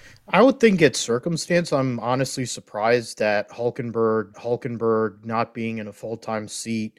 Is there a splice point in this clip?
yes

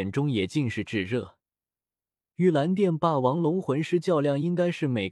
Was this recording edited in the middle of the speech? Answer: no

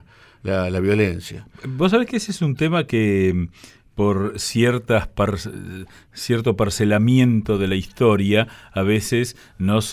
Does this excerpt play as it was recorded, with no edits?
yes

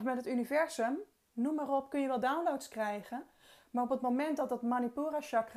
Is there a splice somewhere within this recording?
no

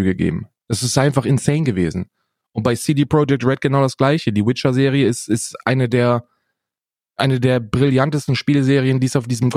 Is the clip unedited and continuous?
yes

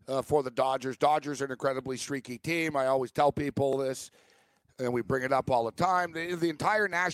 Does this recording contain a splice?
no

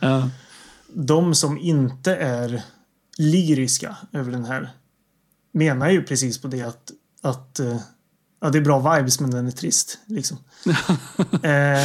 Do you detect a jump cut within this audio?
no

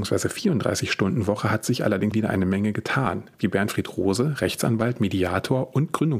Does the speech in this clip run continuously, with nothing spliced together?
no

